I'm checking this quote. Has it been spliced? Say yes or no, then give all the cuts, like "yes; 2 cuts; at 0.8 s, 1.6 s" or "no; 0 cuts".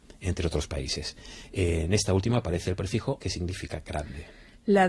yes; 1 cut; at 3.2 s